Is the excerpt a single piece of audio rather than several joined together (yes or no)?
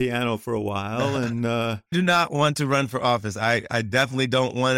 no